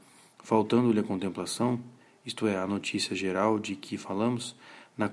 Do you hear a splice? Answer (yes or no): no